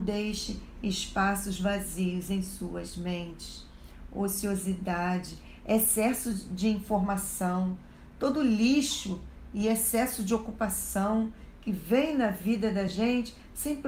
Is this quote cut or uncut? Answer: uncut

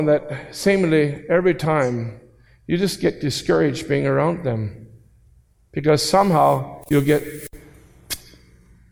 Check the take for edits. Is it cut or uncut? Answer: uncut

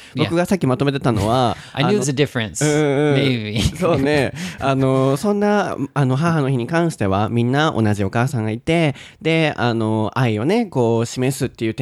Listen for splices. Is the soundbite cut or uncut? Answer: cut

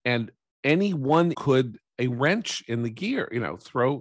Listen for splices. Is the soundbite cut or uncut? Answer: cut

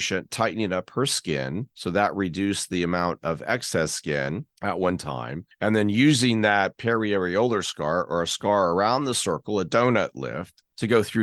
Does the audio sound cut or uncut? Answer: uncut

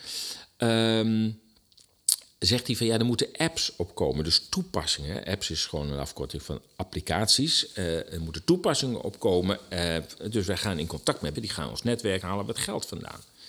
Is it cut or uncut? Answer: cut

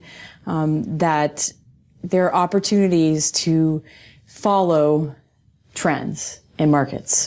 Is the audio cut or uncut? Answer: uncut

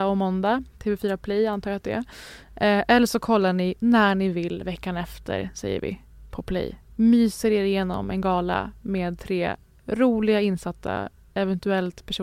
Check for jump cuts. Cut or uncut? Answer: uncut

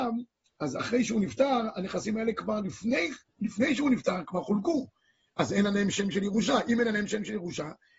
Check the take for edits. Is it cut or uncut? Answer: uncut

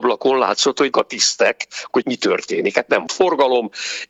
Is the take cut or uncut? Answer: cut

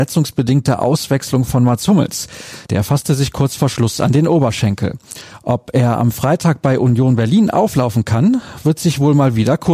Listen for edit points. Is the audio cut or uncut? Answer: uncut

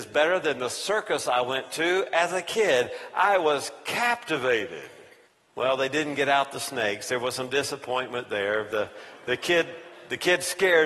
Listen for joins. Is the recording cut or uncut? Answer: cut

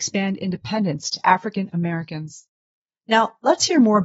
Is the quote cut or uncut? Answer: uncut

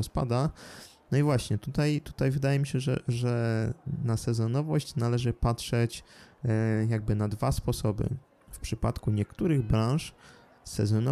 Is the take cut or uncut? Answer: uncut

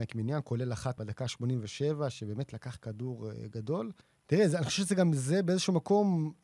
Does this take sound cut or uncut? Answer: cut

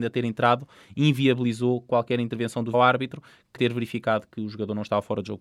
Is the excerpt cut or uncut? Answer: cut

